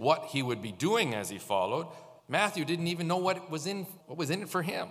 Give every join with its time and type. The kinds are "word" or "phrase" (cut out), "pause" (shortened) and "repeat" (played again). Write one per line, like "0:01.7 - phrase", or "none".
0:02.2 - pause
0:04.0 - phrase